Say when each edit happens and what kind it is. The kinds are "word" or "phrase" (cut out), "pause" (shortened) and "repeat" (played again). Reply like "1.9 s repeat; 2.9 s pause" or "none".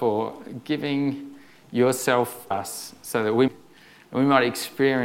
2.5 s word; 3.5 s phrase